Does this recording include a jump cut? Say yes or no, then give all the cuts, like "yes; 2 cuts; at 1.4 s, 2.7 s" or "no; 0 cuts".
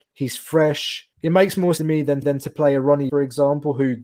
yes; 4 cuts; at 1.1 s, 1.8 s, 2.2 s, 3.1 s